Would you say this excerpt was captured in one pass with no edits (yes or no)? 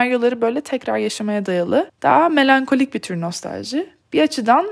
yes